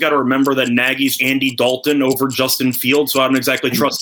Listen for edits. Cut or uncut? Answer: cut